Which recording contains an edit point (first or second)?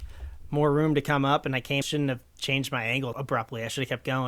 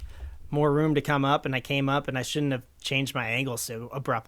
first